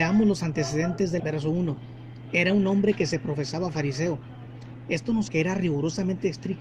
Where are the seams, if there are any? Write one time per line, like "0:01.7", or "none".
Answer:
0:01.2
0:05.3